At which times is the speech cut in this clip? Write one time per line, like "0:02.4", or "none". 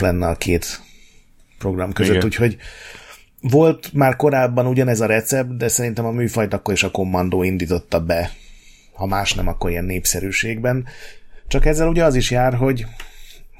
none